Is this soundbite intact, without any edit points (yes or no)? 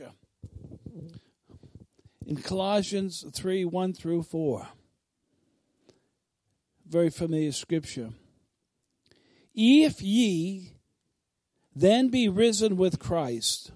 yes